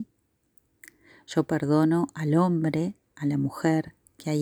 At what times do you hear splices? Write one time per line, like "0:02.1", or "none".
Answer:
none